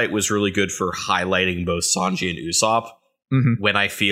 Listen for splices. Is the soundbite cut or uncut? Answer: uncut